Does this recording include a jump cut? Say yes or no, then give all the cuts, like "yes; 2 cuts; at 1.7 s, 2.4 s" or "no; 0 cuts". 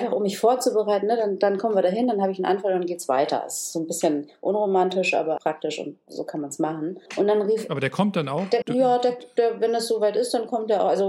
yes; 3 cuts; at 5.4 s, 7.1 s, 8.6 s